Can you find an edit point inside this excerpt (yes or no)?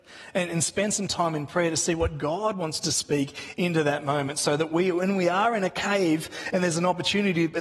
no